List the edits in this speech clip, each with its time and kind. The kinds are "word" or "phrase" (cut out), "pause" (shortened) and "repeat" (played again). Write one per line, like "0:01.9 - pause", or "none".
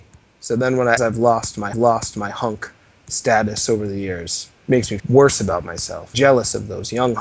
0:01.0 - word
0:01.7 - repeat
0:04.6 - pause
0:05.0 - word
0:06.1 - word